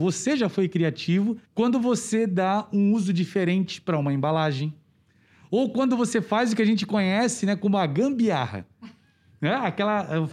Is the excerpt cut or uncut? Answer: cut